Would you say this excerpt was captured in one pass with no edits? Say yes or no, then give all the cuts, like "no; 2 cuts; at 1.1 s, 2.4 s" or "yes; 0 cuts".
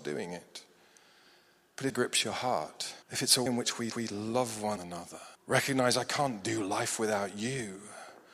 no; 6 cuts; at 1.9 s, 3.0 s, 3.5 s, 3.9 s, 4.8 s, 5.3 s